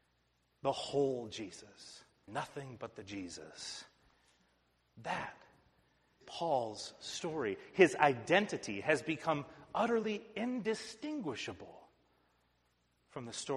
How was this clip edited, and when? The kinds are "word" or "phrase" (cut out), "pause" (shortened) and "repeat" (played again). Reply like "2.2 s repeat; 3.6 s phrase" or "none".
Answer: 2.3 s word; 6.2 s word

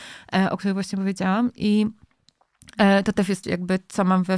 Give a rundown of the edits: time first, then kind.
3.4 s word

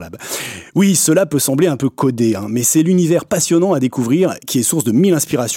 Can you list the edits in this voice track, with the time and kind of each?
none

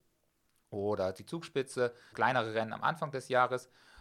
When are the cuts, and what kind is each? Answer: 2.1 s word

